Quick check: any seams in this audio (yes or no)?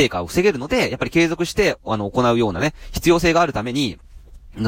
no